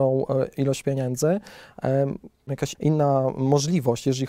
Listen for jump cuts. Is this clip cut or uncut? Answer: cut